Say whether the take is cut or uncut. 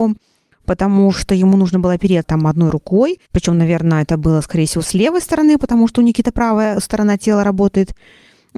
cut